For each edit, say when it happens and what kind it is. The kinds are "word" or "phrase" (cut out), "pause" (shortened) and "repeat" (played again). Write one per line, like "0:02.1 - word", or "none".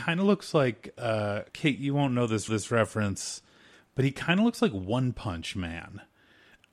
0:01.5 - pause
0:02.5 - repeat